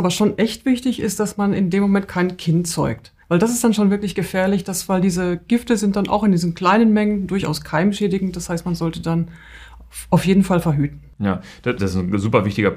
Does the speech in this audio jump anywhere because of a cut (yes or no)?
yes